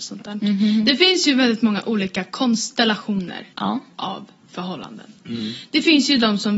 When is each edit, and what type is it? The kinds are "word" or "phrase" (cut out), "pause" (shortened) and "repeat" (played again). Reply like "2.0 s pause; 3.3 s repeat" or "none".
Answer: 3.5 s pause